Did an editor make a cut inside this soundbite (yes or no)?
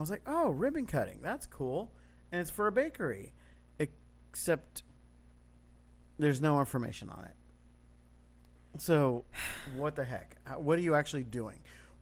no